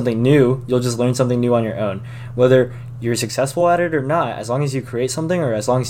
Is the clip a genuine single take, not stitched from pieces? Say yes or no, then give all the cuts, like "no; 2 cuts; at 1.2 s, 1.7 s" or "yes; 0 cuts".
yes; 0 cuts